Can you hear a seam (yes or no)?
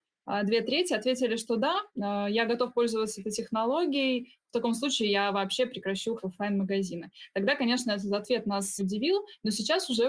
yes